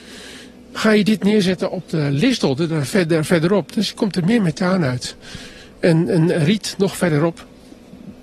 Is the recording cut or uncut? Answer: uncut